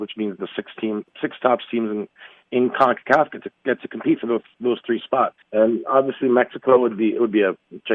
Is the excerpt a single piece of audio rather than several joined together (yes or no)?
no